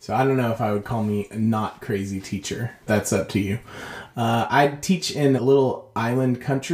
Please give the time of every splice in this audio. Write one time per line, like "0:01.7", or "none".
0:02.9
0:05.4